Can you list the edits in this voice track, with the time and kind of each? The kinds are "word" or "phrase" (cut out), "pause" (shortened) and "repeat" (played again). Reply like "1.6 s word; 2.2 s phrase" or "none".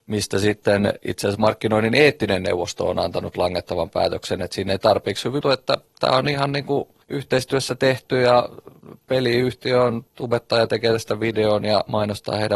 5.4 s word; 7.0 s pause; 10.1 s phrase